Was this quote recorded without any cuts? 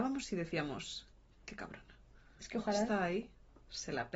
yes; 0 cuts

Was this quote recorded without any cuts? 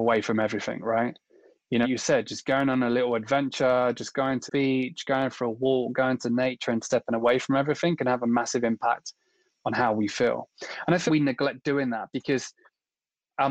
no; 3 cuts; at 1.8 s, 4.5 s, 11.1 s

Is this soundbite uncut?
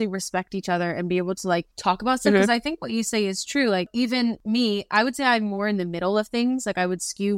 no; 1 cut; at 1.7 s

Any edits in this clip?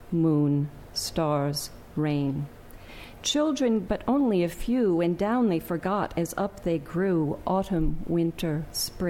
yes; 1 cut; at 3.9 s

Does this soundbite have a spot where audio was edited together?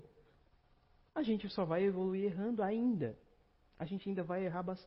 no; 0 cuts

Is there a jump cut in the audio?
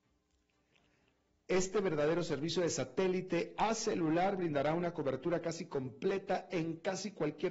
no; 0 cuts

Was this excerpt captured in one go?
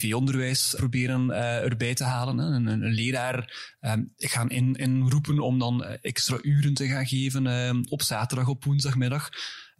yes; 0 cuts

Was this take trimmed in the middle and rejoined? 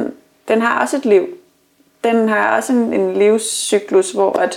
no; 0 cuts

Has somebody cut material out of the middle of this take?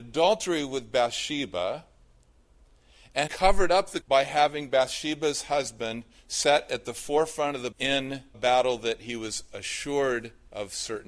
yes; 4 cuts; at 3.3 s, 4.0 s, 7.7 s, 8.3 s

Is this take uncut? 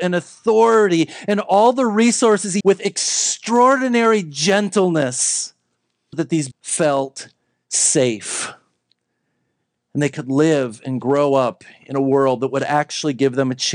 no; 3 cuts; at 2.6 s, 6.1 s, 6.5 s

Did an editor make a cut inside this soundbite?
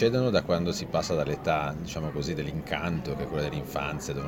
no; 0 cuts

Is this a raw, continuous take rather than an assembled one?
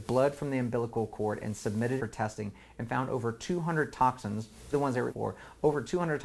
no; 3 cuts; at 2.0 s, 4.7 s, 5.1 s

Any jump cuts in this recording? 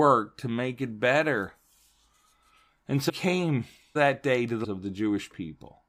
yes; 3 cuts; at 3.1 s, 4.0 s, 4.6 s

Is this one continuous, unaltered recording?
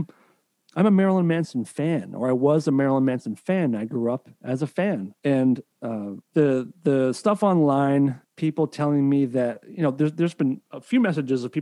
no; 3 cuts; at 5.2 s, 6.2 s, 8.2 s

